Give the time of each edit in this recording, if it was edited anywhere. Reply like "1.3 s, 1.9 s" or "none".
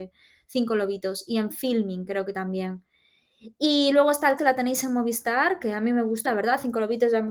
4.4 s, 6.3 s